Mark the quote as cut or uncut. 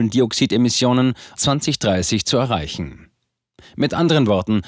cut